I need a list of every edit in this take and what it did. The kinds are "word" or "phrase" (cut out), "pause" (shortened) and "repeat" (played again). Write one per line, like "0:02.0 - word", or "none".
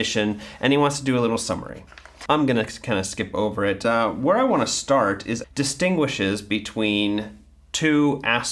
0:05.4 - phrase